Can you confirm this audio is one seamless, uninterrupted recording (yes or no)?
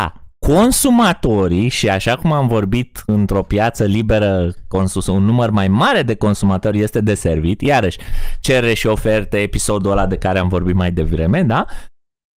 yes